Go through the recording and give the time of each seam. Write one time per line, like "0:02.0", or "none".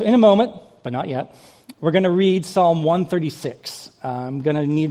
none